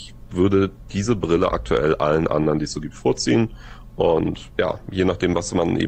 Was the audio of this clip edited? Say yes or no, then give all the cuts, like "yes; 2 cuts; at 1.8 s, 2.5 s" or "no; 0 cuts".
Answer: yes; 1 cut; at 4.5 s